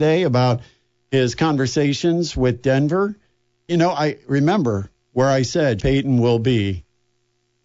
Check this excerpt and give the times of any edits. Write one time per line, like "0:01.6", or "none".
0:03.7
0:05.8